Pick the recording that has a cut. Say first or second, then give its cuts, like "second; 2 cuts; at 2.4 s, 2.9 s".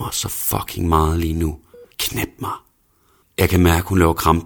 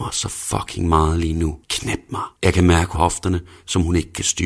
second; 3 cuts; at 1.6 s, 2.3 s, 2.9 s